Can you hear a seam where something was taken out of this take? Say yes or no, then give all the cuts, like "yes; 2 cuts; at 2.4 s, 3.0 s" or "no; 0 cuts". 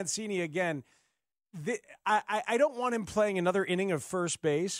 no; 0 cuts